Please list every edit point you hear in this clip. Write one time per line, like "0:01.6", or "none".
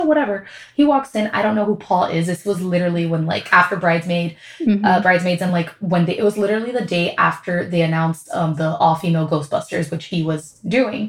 none